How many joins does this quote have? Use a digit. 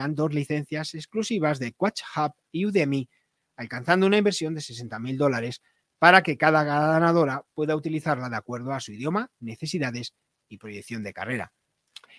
0